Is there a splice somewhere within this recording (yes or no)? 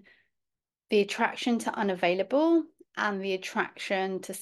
no